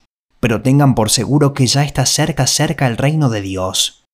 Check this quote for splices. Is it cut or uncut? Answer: cut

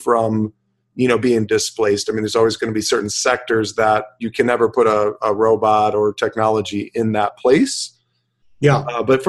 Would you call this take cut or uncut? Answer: uncut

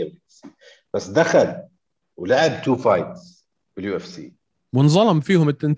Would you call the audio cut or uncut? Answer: cut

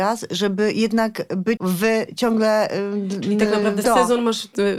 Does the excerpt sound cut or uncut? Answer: cut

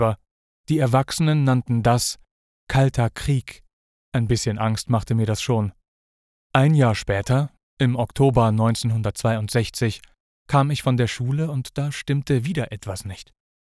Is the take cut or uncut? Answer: uncut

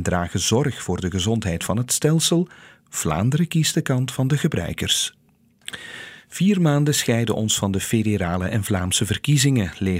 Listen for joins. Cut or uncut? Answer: uncut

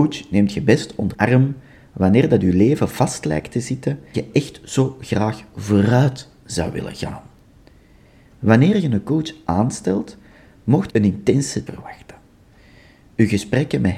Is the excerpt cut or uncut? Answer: cut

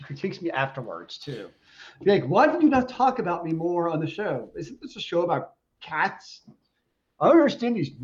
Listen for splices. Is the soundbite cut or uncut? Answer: uncut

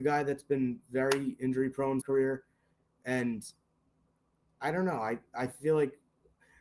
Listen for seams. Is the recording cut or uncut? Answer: cut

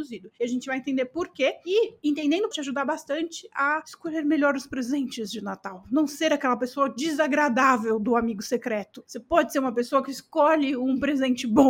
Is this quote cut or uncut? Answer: cut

